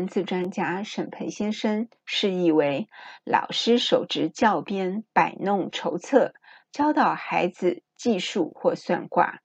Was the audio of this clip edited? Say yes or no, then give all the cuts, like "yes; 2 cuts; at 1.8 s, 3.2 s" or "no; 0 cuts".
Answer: yes; 1 cut; at 5.1 s